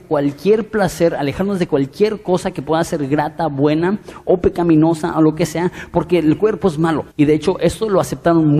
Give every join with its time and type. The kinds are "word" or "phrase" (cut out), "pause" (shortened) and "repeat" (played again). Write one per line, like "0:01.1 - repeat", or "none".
0:07.1 - pause